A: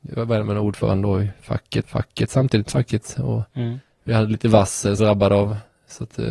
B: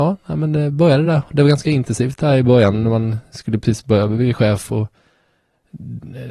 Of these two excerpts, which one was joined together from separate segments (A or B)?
A